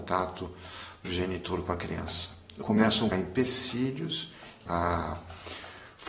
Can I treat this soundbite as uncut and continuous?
no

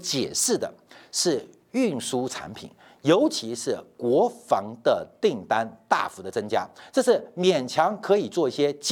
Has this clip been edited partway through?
no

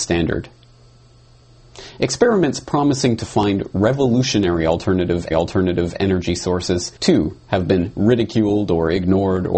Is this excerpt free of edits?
no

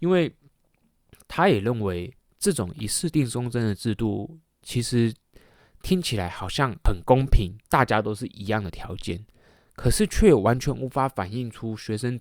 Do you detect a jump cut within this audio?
yes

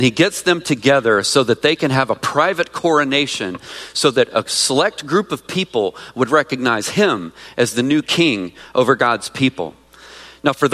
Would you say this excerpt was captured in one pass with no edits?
yes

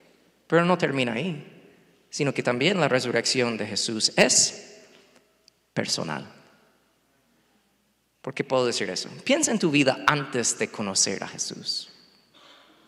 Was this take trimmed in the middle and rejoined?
no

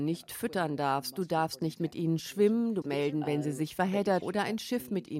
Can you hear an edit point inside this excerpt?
yes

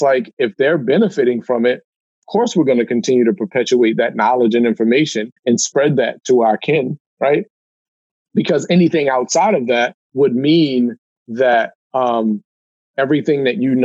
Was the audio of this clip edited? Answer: yes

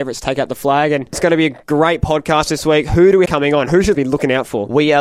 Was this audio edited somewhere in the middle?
yes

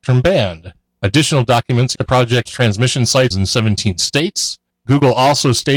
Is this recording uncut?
no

